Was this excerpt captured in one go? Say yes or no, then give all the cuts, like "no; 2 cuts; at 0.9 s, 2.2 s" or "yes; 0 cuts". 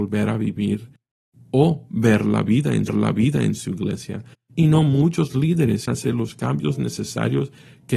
no; 2 cuts; at 2.9 s, 5.9 s